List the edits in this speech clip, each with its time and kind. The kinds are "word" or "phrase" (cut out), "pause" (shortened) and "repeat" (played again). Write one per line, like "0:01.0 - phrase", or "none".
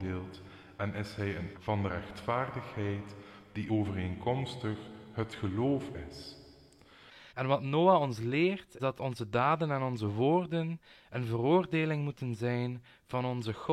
0:01.5 - phrase
0:07.3 - pause
0:08.8 - word

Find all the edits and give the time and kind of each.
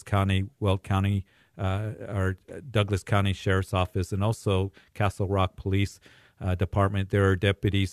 none

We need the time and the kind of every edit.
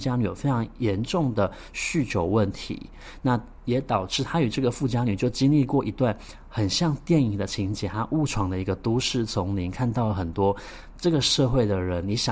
none

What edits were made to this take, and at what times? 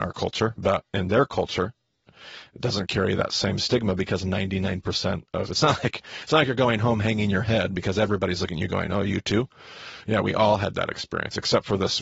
none

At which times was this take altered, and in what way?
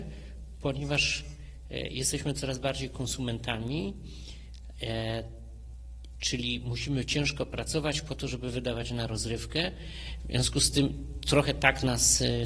none

